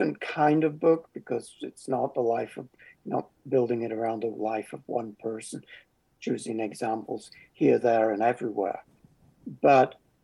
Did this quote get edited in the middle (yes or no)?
no